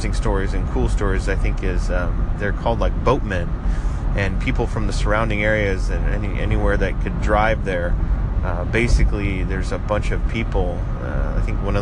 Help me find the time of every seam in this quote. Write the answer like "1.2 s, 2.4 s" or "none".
none